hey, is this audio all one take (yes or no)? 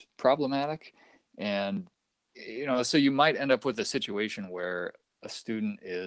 yes